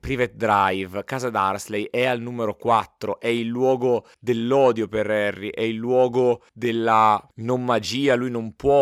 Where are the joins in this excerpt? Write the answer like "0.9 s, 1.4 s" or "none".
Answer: 4.1 s, 6.5 s